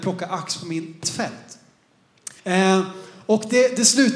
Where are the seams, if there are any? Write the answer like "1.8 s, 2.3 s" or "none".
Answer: 1.0 s, 2.4 s